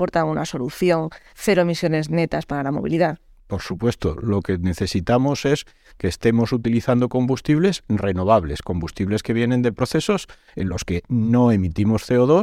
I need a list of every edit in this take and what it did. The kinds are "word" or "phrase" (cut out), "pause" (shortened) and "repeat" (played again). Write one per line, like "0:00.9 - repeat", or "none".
none